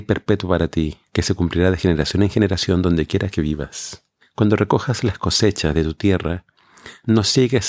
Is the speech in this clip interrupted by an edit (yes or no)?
no